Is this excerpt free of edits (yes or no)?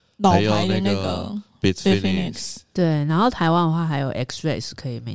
yes